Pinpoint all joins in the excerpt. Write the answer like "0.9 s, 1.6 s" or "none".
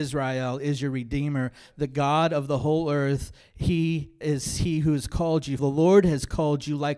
4.2 s, 5.6 s

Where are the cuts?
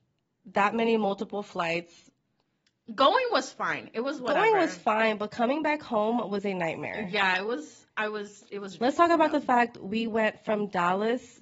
none

